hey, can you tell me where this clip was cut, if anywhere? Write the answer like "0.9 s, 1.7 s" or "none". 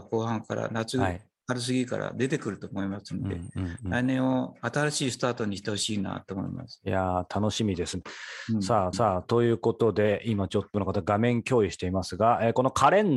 8.9 s, 10.7 s